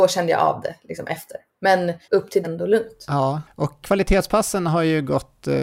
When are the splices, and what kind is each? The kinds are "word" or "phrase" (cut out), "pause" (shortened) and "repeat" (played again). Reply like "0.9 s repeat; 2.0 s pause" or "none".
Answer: 2.0 s pause; 2.4 s phrase; 3.8 s word